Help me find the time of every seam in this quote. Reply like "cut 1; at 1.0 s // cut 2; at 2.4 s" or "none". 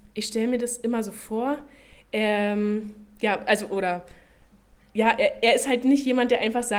none